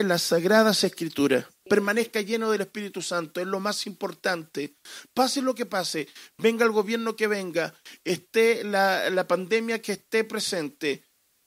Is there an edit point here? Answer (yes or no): no